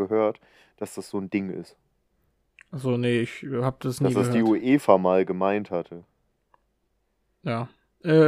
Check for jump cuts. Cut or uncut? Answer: uncut